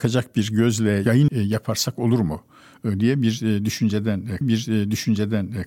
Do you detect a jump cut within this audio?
yes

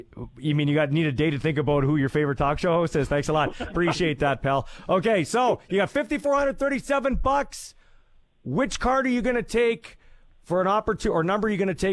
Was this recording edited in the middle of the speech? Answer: no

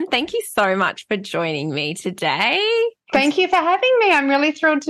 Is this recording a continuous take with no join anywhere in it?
yes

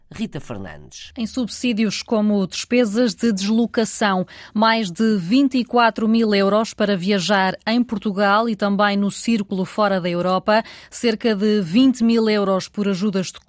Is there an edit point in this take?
no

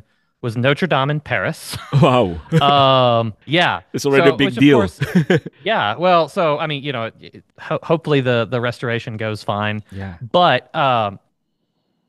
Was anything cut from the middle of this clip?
yes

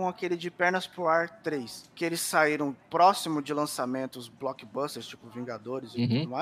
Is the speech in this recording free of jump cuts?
yes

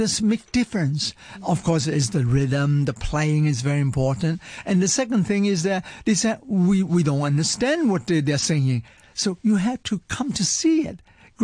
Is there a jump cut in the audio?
no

